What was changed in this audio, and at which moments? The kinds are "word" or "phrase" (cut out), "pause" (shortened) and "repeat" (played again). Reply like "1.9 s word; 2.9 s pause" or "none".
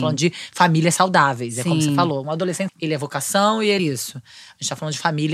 2.7 s word; 3.8 s word